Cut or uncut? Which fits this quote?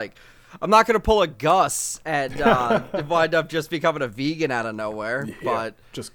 uncut